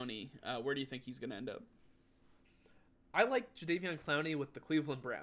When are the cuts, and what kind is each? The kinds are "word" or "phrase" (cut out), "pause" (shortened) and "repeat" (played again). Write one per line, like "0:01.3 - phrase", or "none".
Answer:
none